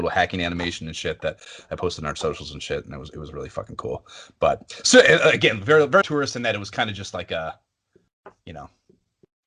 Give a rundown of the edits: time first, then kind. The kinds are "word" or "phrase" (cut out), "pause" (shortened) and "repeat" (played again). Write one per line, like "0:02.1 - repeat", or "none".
0:06.0 - word